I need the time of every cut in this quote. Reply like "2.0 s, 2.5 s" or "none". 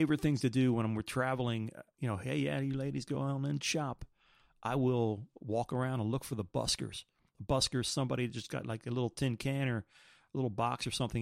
none